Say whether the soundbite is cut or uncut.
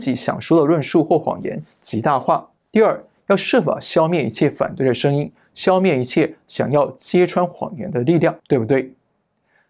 cut